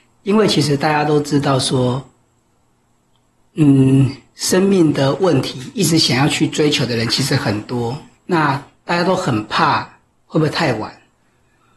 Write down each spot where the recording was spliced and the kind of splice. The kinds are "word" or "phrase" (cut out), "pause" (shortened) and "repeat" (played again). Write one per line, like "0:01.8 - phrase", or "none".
0:08.2 - pause
0:10.1 - pause